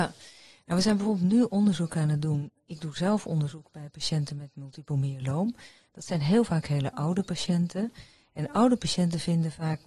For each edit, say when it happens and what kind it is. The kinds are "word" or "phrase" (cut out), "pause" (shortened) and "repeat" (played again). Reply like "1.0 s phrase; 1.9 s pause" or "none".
none